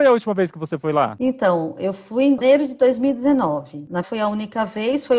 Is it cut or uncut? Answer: cut